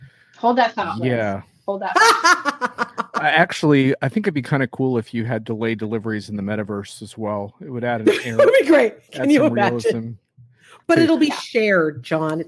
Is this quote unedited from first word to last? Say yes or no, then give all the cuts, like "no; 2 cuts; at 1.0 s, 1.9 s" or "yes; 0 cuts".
yes; 0 cuts